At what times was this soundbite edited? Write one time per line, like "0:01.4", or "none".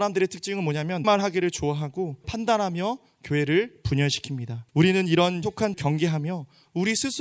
0:01.0
0:02.2
0:04.7
0:05.4
0:05.7

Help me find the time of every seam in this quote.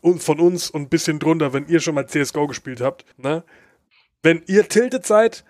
0:03.1

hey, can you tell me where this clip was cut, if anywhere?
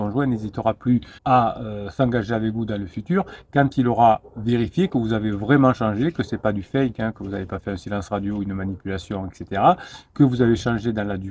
0:01.2

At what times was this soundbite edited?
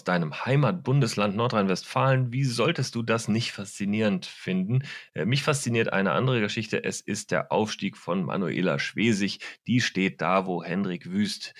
none

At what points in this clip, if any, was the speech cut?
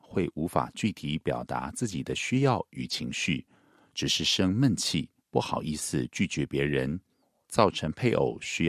0:05.2

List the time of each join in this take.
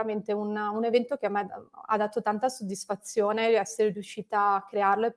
none

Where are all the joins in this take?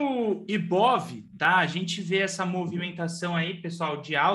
none

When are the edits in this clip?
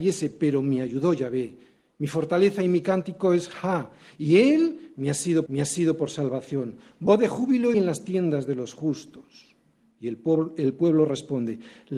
0:05.5
0:07.7

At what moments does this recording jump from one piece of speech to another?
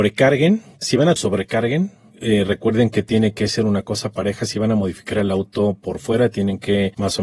0:01.2

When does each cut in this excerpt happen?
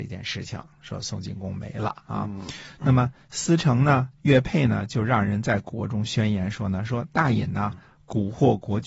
none

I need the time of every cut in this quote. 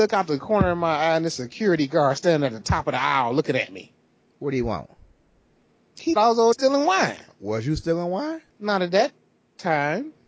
0:06.2
0:06.5
0:08.5

